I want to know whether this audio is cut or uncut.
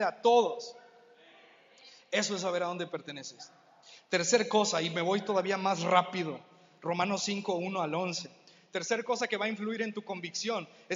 uncut